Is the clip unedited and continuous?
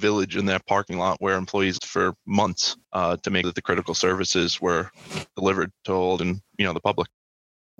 no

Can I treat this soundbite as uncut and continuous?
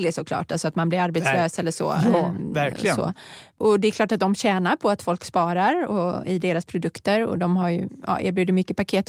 yes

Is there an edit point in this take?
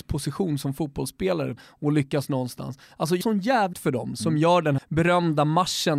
yes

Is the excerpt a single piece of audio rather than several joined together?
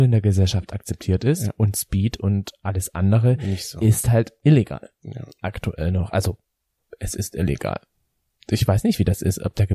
yes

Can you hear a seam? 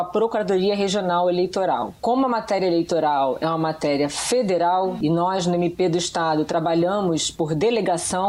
yes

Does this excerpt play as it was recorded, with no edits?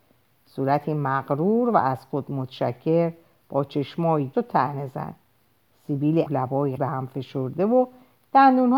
no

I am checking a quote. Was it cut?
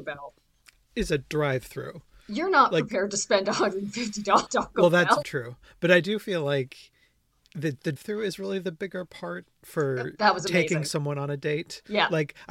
yes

